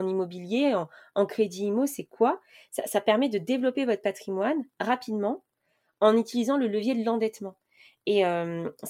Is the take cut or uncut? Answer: uncut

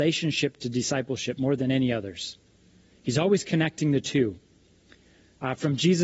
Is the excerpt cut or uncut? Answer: uncut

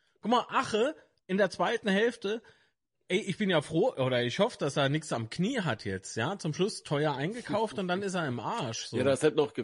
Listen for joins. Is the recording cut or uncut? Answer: uncut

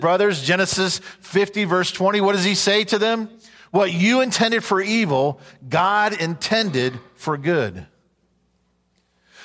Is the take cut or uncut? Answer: uncut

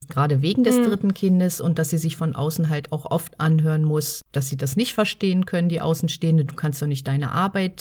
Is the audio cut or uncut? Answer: cut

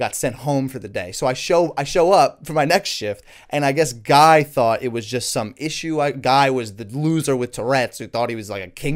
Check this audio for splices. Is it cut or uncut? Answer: uncut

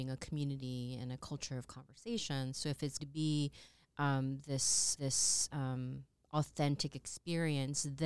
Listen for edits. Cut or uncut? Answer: cut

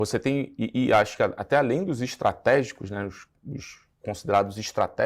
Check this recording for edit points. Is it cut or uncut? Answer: cut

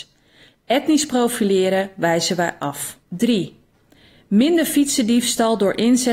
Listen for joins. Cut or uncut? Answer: cut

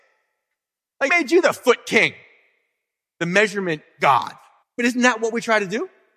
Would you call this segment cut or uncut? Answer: cut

